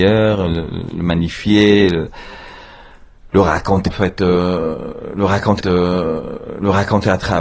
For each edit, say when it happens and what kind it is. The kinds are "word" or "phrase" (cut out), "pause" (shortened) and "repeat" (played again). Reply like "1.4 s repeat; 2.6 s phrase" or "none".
3.9 s word; 5.6 s repeat